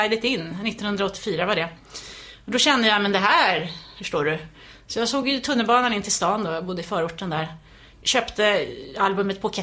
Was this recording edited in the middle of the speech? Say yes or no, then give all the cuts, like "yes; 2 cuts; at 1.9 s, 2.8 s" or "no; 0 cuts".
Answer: no; 0 cuts